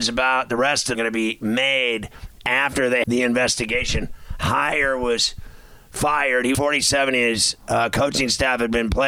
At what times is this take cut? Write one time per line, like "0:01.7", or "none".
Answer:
0:00.9
0:03.0
0:06.5